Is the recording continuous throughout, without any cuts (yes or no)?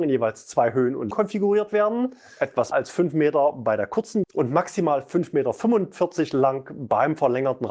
no